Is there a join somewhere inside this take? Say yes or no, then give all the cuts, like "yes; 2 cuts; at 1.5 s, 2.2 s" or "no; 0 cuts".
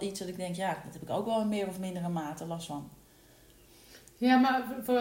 no; 0 cuts